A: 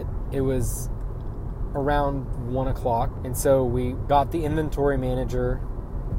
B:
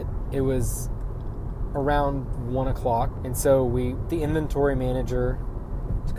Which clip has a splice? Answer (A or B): B